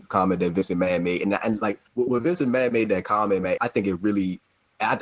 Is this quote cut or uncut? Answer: cut